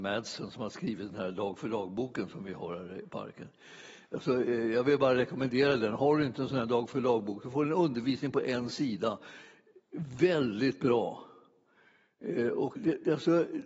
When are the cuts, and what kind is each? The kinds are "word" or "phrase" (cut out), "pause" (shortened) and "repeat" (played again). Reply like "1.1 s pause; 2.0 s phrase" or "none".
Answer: 12.8 s word